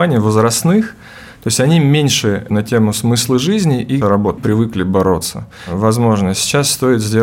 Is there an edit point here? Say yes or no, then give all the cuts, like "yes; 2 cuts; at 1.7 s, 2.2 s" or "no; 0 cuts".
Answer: yes; 3 cuts; at 2.5 s, 4.0 s, 4.4 s